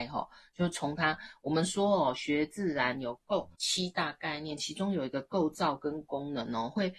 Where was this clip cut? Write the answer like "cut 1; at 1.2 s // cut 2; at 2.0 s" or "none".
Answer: cut 1; at 3.5 s